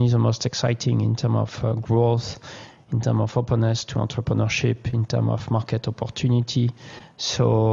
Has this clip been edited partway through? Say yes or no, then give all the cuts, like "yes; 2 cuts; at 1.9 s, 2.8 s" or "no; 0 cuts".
no; 0 cuts